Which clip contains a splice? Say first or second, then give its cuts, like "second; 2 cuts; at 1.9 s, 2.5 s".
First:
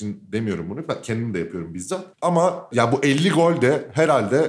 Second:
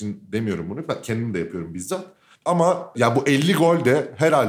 first; 1 cut; at 2.1 s